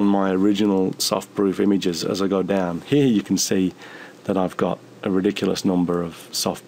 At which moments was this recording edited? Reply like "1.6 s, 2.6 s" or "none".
none